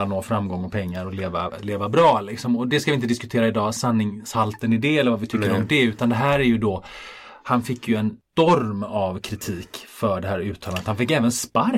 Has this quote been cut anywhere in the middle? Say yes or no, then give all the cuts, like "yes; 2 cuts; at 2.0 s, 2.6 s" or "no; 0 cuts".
no; 0 cuts